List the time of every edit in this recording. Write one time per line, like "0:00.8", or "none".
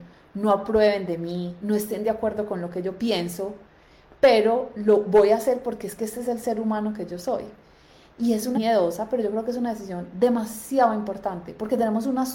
0:08.5

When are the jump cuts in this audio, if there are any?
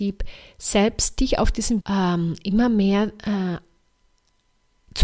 0:01.8

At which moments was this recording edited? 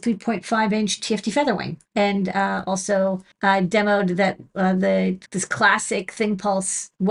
0:01.9
0:03.3
0:05.3

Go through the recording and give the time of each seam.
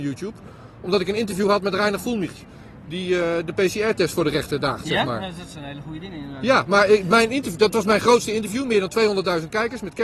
none

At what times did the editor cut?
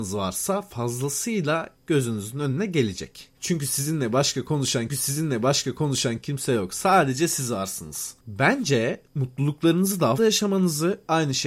0:04.9
0:10.2

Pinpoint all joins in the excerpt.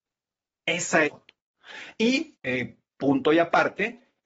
0:01.0
0:02.4

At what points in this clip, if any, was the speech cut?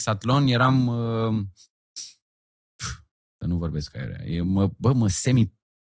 none

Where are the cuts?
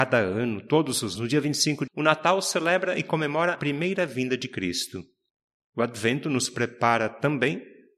0:01.2
0:01.9
0:03.5
0:05.3

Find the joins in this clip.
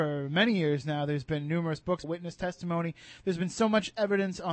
0:02.0

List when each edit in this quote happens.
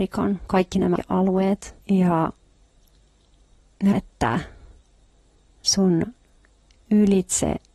0:01.0
0:01.8
0:03.9

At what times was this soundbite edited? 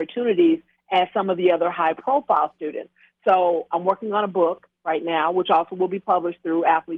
none

